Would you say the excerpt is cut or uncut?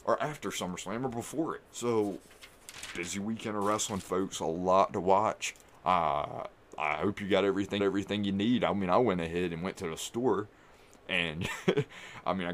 cut